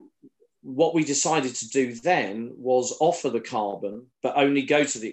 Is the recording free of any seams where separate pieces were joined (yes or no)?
no